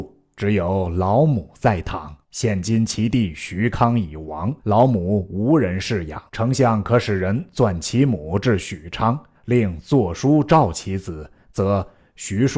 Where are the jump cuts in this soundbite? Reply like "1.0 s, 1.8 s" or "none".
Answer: 2.2 s, 4.6 s, 6.3 s, 9.3 s